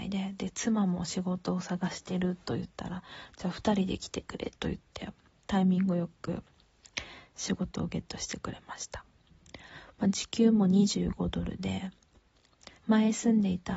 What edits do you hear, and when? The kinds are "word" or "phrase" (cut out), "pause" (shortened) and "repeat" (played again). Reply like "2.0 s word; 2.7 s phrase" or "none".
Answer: 12.8 s pause